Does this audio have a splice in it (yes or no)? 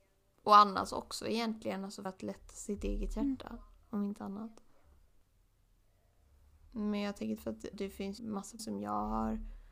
yes